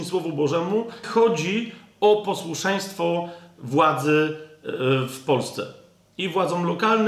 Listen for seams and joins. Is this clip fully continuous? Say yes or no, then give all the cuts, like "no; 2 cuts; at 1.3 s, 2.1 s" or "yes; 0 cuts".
no; 1 cut; at 1.0 s